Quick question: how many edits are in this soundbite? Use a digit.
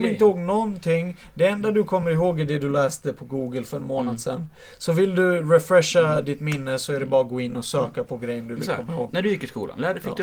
0